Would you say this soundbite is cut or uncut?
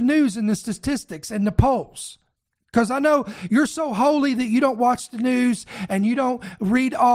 uncut